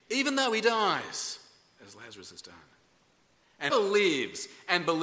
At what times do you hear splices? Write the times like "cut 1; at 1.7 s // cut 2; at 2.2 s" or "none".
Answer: cut 1; at 2.4 s // cut 2; at 3.7 s